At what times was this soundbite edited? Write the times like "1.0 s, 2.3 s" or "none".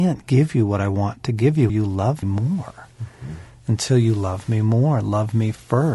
1.7 s, 2.2 s